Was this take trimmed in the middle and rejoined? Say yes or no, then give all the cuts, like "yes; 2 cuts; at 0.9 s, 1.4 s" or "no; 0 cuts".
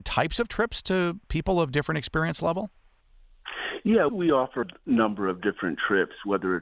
yes; 2 cuts; at 4.1 s, 4.6 s